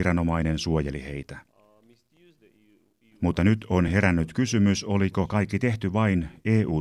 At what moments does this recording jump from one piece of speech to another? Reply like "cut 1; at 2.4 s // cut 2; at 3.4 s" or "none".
none